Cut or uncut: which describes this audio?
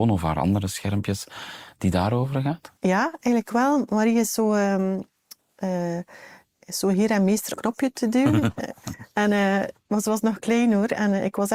cut